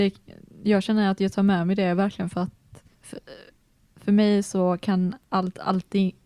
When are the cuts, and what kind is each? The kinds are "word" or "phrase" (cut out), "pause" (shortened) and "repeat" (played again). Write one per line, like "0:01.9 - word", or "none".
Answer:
0:02.9 - pause
0:05.2 - pause